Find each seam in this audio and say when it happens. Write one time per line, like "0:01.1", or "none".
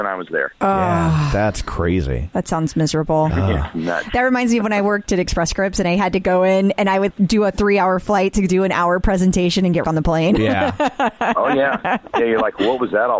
0:05.1
0:07.1
0:09.8

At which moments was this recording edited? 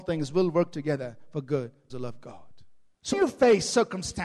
0:01.9
0:03.1

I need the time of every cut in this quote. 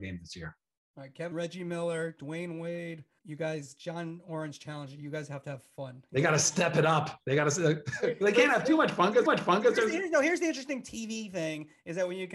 0:01.3
0:03.2
0:09.3

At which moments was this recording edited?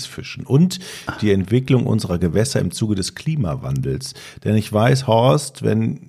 none

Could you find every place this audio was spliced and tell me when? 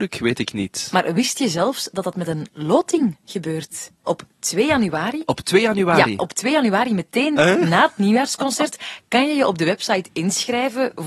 none

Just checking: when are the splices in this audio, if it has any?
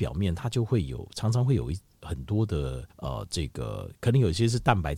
0:02.9

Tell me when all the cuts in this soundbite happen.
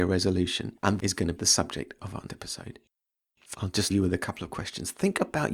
0:01.0
0:01.4
0:02.3
0:03.5
0:03.9

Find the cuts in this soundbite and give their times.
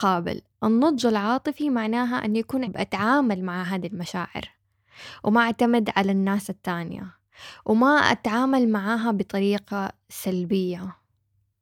0:02.7

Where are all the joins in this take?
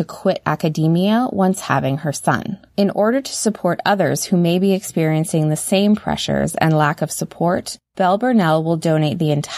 0:02.7
0:07.8

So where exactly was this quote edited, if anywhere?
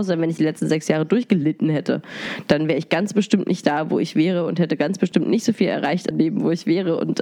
0:06.1

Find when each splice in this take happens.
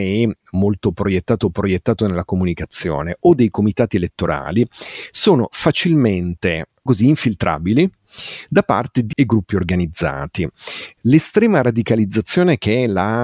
0:01.4
0:06.9
0:09.1

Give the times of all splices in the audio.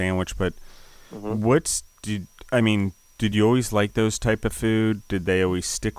none

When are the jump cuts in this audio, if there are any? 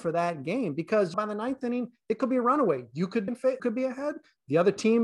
0:01.1
0:03.3
0:03.6

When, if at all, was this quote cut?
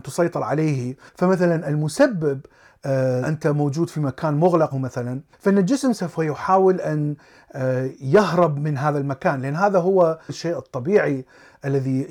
0:03.2
0:04.7

